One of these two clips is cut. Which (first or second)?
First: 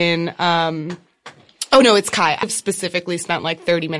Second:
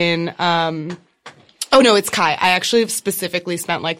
first